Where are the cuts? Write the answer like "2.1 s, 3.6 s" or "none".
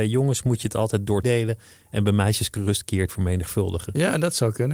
1.2 s, 2.5 s, 3.1 s